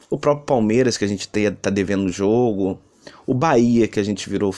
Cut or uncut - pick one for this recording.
uncut